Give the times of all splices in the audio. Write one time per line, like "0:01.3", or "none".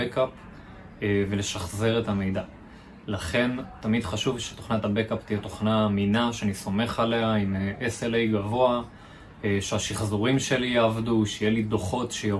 none